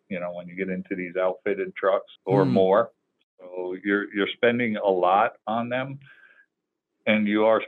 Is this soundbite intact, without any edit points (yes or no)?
no